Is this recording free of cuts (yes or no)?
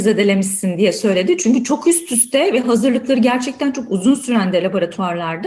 yes